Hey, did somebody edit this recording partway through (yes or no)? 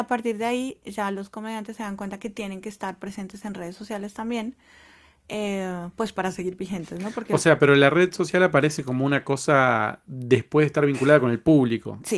no